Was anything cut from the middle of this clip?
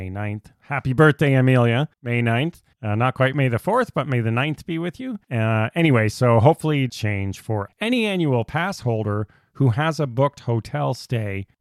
yes; 4 cuts; at 1.9 s, 2.7 s, 5.2 s, 6.9 s

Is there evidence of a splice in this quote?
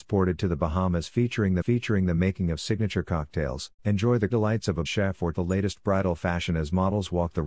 yes; 5 cuts; at 1.6 s, 3.8 s, 4.3 s, 4.8 s, 5.3 s

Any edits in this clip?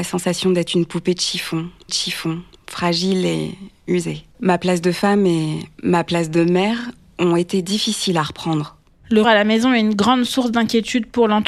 yes; 3 cuts; at 1.9 s, 4.3 s, 9.2 s

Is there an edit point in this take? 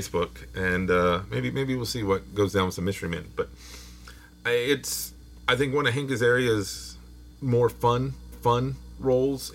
yes; 3 cuts; at 5.4 s, 7.4 s, 8.3 s

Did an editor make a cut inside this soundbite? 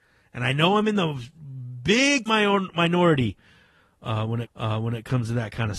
yes; 2 cuts; at 2.3 s, 4.4 s

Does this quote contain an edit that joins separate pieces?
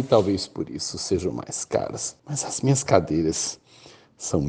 yes; 1 cut; at 2.2 s

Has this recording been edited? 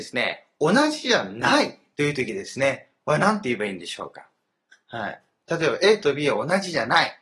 no; 0 cuts

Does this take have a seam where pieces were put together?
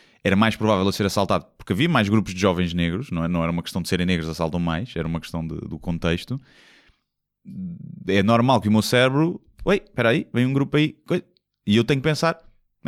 no; 0 cuts

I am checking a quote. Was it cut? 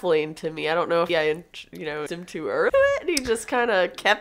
yes; 3 cuts; at 1.1 s, 2.1 s, 2.7 s

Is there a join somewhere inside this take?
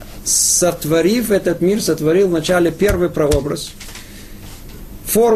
no; 0 cuts

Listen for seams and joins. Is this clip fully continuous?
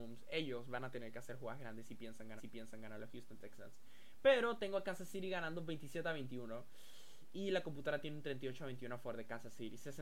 no; 1 cut; at 2.4 s

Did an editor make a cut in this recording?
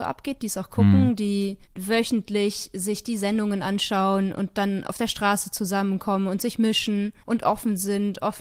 yes; 2 cuts; at 1.6 s, 7.2 s

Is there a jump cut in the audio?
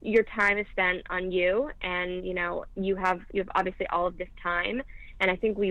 no; 0 cuts

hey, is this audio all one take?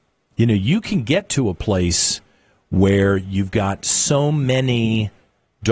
yes; 0 cuts

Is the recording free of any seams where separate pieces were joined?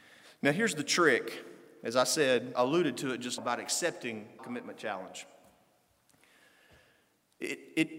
no; 3 cuts; at 2.5 s, 3.4 s, 4.4 s

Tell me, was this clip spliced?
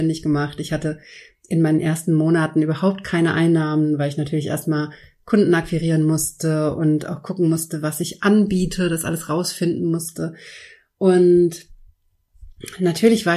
no; 0 cuts

